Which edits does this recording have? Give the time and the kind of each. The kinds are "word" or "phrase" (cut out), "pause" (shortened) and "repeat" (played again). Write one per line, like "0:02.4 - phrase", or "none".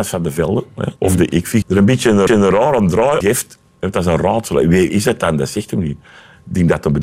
0:01.0 - pause
0:01.6 - word
0:02.3 - repeat
0:03.2 - word
0:04.9 - word